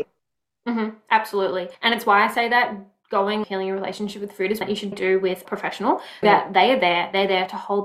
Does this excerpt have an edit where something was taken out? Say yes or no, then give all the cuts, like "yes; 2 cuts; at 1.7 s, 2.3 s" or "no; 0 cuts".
yes; 6 cuts; at 1.7 s, 3.4 s, 4.6 s, 4.9 s, 5.4 s, 6.2 s